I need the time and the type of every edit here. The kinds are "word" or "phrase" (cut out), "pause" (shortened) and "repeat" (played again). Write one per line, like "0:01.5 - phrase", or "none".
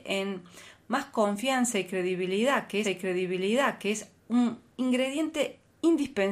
0:02.8 - repeat